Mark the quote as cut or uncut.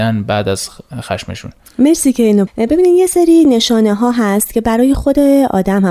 cut